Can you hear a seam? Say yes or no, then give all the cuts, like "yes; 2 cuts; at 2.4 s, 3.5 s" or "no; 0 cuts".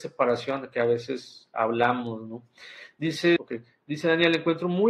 yes; 2 cuts; at 1.5 s, 3.4 s